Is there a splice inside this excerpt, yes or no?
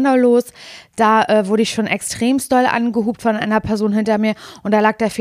no